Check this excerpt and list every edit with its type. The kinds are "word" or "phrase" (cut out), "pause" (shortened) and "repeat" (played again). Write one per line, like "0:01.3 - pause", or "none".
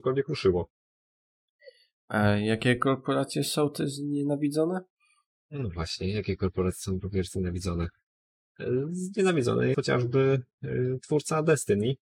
0:09.7 - word